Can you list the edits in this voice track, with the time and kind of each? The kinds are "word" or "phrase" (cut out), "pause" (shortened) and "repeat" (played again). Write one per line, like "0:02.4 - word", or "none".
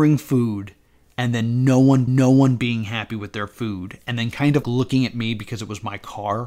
0:02.1 - repeat
0:04.6 - word